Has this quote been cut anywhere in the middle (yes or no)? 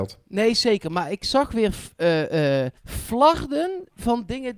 yes